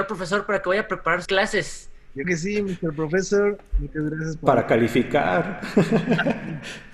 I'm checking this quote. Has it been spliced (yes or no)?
yes